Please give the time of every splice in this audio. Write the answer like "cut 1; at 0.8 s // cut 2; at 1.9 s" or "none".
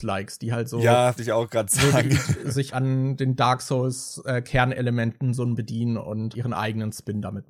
cut 1; at 1.2 s // cut 2; at 2.7 s // cut 3; at 5.6 s // cut 4; at 6.3 s